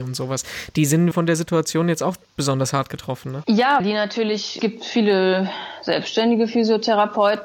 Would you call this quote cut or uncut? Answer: cut